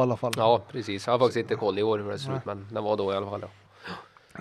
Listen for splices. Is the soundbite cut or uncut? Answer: uncut